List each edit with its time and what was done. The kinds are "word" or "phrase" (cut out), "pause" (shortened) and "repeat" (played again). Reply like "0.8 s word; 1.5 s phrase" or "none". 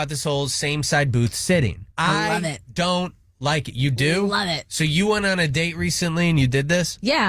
1.9 s pause